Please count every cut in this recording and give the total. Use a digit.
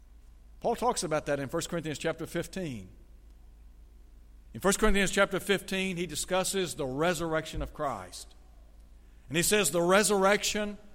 0